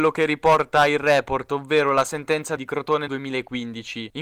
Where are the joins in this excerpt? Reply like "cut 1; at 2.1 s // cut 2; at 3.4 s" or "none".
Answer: cut 1; at 2.6 s // cut 2; at 3.1 s